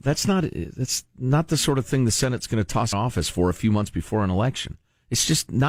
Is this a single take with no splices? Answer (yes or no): no